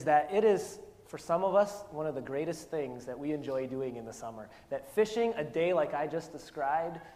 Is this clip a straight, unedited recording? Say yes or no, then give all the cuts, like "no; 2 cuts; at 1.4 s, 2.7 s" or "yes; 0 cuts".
yes; 0 cuts